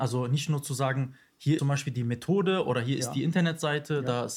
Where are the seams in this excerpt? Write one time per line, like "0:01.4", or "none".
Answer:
0:01.6